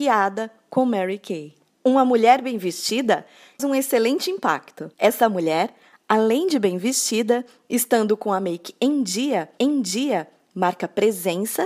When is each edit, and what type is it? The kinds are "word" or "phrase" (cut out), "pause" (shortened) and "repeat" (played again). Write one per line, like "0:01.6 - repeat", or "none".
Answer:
0:01.7 - pause
0:03.6 - word
0:04.9 - pause
0:09.6 - repeat